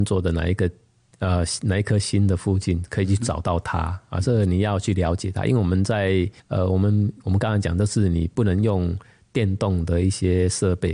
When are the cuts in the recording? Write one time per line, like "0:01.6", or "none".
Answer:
0:06.4